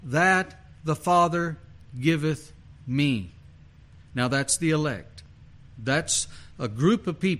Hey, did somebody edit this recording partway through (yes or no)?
no